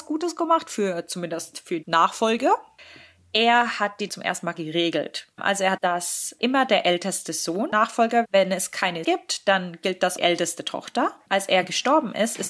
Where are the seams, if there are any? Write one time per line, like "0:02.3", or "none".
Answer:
0:01.8
0:04.1
0:04.5
0:05.3
0:05.8
0:08.2
0:09.0
0:10.2